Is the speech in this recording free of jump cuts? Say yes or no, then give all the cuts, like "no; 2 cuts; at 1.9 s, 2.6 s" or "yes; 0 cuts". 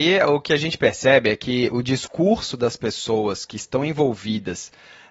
yes; 0 cuts